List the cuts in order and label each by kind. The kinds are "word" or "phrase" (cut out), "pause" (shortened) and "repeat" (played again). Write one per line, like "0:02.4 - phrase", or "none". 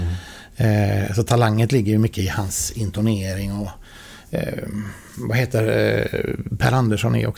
0:05.1 - pause